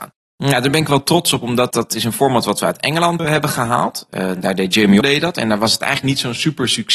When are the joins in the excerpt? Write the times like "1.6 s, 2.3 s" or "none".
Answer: 1.7 s, 3.2 s, 5.0 s